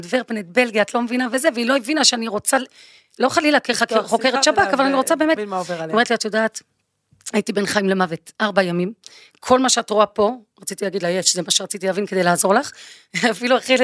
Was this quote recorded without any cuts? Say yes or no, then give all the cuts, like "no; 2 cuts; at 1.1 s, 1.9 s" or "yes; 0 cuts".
no; 1 cut; at 5.4 s